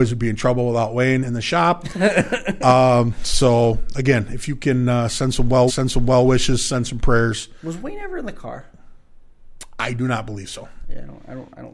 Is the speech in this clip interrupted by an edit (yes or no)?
yes